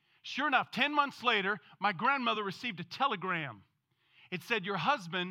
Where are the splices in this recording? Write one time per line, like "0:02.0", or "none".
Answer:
none

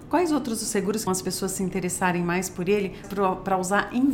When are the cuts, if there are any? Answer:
0:01.1
0:03.0

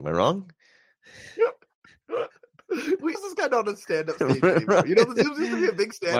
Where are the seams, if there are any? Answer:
0:03.1

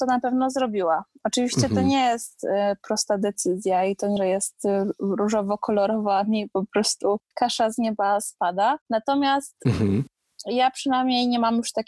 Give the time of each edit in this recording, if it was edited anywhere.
0:04.2
0:07.2
0:08.8

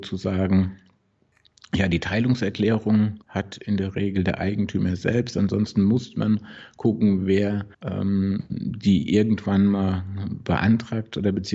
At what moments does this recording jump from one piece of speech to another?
0:03.2
0:07.7

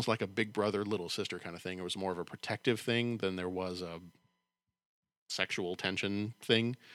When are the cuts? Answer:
none

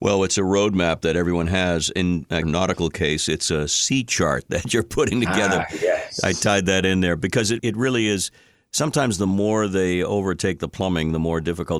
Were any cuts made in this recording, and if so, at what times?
0:02.4
0:07.6

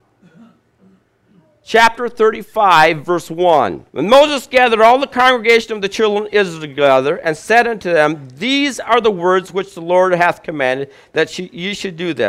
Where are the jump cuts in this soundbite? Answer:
0:03.9

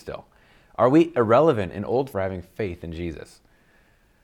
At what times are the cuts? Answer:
0:02.1

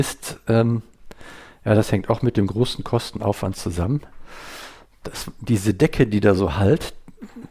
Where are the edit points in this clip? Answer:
none

